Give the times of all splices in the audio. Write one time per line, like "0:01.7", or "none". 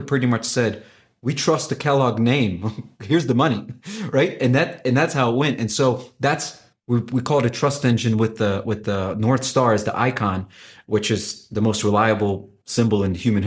none